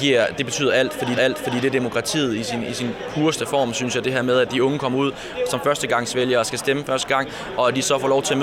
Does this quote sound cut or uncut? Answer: cut